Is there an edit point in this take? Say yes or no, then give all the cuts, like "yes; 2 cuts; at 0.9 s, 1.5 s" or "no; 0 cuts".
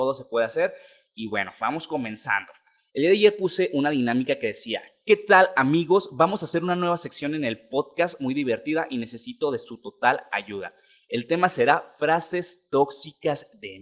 no; 0 cuts